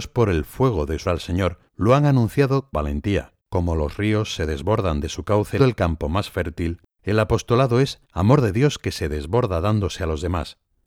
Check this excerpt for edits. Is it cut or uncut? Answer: cut